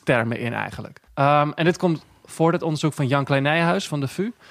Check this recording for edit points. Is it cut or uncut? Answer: cut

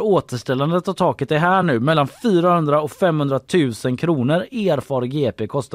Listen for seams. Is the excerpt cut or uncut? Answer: uncut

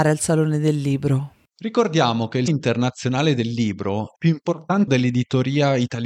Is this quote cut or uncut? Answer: cut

